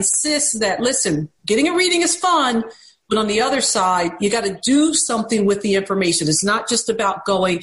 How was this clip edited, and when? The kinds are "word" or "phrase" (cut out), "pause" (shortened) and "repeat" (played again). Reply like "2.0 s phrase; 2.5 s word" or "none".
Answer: none